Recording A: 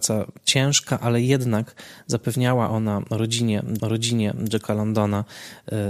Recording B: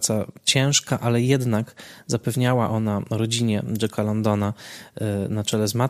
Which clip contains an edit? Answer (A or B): A